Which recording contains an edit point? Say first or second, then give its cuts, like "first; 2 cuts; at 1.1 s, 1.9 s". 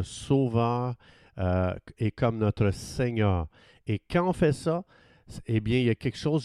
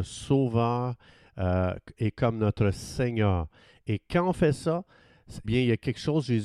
second; 1 cut; at 5.4 s